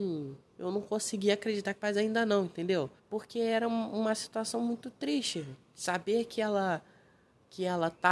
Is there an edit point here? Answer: yes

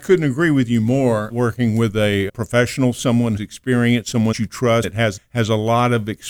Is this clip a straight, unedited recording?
no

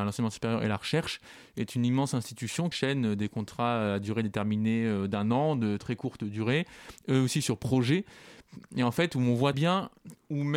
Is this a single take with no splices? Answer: no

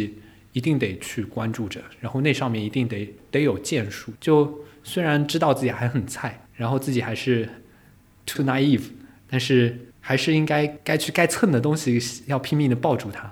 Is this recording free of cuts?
no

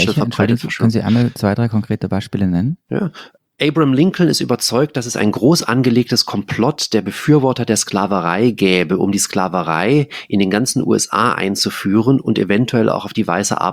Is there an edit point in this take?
no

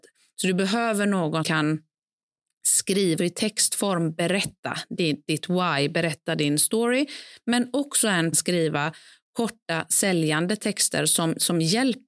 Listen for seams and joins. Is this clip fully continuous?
no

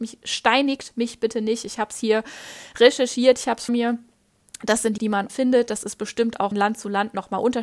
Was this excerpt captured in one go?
no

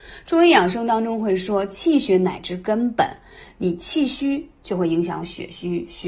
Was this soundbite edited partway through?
no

